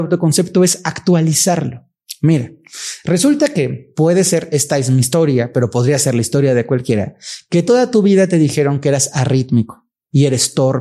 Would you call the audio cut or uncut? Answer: uncut